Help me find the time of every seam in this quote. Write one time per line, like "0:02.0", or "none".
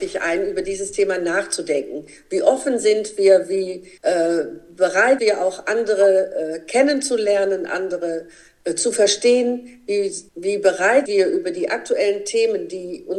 0:04.0
0:05.2
0:10.3
0:11.1